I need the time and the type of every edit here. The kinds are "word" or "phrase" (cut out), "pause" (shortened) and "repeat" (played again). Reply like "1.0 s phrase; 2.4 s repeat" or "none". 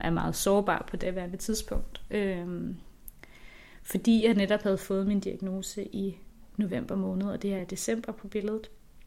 none